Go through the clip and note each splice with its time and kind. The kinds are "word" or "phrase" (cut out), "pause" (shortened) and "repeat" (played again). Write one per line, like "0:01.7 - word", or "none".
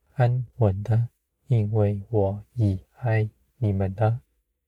0:01.3 - pause